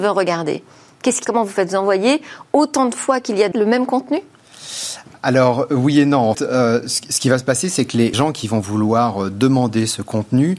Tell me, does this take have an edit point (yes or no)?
yes